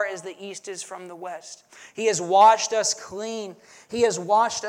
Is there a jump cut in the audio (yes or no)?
no